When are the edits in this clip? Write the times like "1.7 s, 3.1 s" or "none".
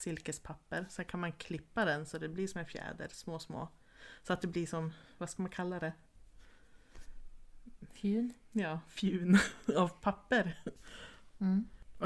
none